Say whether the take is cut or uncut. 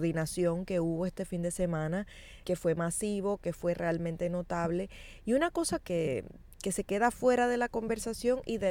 cut